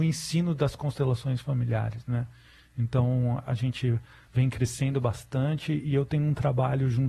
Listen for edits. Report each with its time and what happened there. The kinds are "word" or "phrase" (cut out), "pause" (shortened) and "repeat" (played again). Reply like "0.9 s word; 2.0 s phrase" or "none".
none